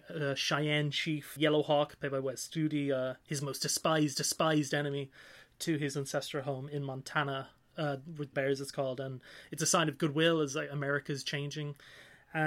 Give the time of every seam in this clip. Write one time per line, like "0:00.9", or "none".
0:01.4
0:04.1
0:08.3